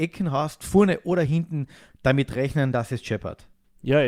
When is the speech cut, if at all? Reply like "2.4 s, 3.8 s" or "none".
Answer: none